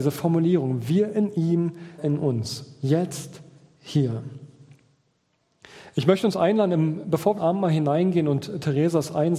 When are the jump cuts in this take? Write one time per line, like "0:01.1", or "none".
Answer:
0:02.0
0:07.4